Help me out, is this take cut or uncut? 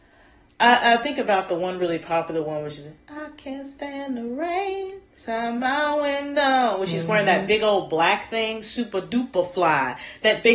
uncut